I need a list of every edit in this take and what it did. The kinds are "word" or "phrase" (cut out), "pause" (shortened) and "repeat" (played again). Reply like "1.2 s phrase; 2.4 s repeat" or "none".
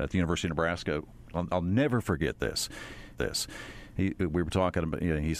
1.3 s phrase; 3.1 s repeat